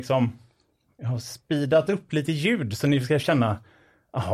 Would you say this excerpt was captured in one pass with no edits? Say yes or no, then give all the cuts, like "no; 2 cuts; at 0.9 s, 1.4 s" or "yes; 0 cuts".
yes; 0 cuts